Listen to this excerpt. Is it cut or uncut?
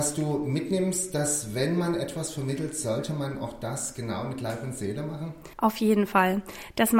cut